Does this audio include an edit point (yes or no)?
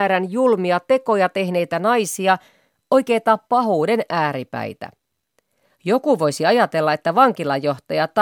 no